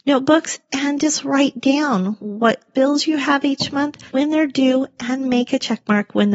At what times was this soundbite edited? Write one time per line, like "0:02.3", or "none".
0:04.1